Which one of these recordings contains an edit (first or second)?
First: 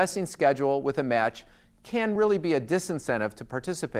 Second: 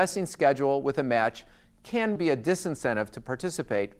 second